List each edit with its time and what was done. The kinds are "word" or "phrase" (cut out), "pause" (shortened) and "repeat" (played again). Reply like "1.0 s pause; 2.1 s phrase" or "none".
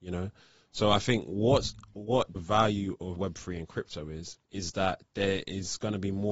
2.4 s word; 3.2 s word; 4.4 s pause